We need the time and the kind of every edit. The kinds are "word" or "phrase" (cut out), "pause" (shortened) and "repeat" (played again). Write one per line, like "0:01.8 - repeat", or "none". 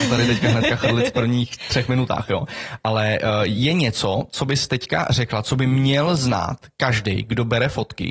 none